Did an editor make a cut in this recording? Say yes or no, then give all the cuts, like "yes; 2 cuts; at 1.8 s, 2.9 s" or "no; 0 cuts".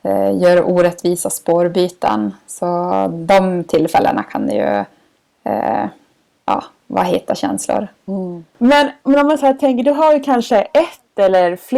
no; 0 cuts